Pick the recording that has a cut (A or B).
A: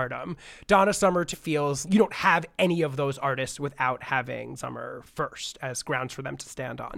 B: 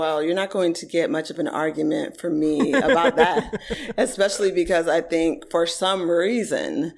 A